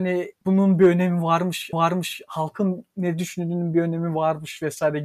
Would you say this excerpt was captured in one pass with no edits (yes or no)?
no